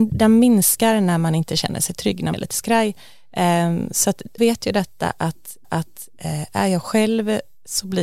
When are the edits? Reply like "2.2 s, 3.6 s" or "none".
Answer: 2.3 s, 4.4 s, 5.6 s